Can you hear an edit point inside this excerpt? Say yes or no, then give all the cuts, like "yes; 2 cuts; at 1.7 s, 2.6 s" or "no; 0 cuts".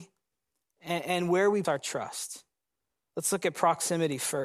yes; 1 cut; at 1.6 s